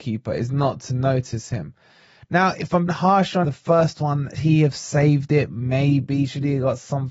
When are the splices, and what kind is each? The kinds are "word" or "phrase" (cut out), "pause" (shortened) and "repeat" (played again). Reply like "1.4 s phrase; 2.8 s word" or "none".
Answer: 2.9 s word; 3.4 s word; 4.4 s word